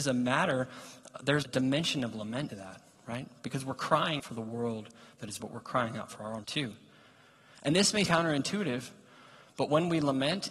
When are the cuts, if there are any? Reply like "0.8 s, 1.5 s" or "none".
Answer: 1.4 s, 2.5 s, 4.2 s, 5.4 s, 6.4 s, 8.1 s